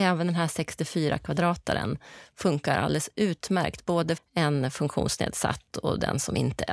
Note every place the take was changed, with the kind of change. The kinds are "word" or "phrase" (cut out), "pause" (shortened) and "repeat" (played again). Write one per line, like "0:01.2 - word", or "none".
0:04.2 - word